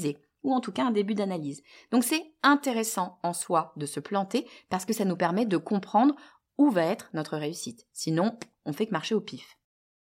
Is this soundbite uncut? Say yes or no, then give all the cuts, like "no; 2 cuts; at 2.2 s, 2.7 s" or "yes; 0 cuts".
yes; 0 cuts